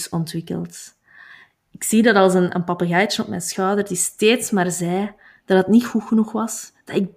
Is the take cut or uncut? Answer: uncut